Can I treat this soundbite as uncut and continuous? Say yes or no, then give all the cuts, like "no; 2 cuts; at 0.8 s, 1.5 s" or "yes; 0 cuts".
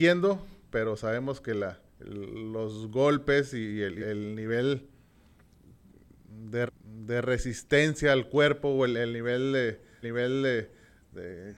no; 4 cuts; at 1.9 s, 4.0 s, 6.7 s, 10.0 s